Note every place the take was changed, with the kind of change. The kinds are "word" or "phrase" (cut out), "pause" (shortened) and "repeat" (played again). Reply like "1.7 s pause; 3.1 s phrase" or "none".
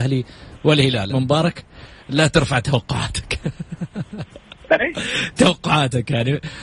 1.1 s phrase; 4.8 s word